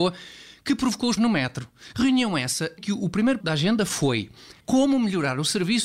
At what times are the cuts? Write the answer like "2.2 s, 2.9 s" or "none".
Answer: 1.2 s, 2.8 s, 3.4 s, 4.6 s